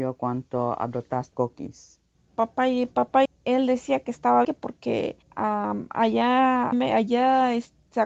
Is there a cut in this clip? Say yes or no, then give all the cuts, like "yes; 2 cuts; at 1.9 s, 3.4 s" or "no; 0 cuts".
yes; 6 cuts; at 1.3 s, 2.1 s, 3.3 s, 4.4 s, 5.2 s, 6.7 s